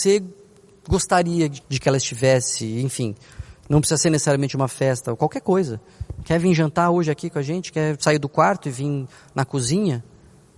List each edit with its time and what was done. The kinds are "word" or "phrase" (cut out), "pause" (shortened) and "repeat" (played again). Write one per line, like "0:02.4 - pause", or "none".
0:01.6 - phrase